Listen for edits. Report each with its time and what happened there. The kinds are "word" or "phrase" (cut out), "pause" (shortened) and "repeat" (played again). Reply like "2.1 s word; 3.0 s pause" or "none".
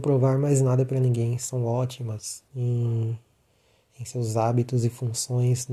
2.5 s pause